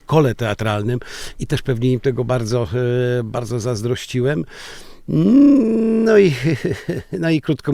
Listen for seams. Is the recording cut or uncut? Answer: uncut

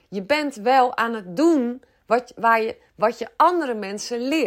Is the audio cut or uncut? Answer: uncut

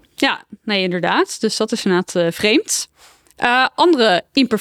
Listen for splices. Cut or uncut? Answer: uncut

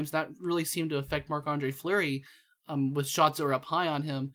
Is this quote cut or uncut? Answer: uncut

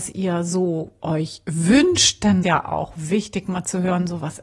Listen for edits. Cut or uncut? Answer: cut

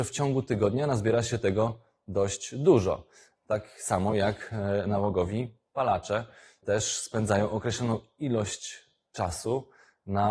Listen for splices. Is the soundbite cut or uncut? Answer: uncut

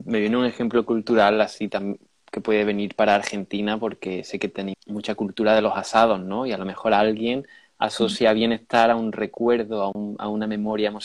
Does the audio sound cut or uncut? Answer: cut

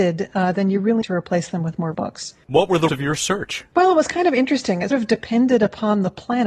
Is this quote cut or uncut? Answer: cut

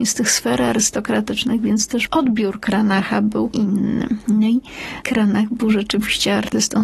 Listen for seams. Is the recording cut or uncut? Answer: cut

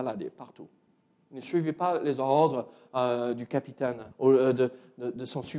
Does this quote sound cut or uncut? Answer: cut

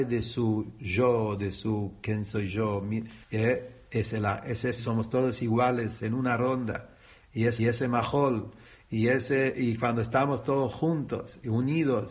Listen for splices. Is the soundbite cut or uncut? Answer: cut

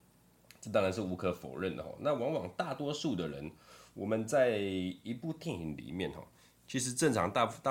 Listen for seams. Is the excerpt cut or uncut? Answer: uncut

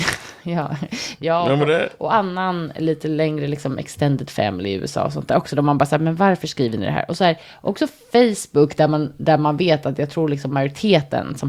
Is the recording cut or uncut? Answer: uncut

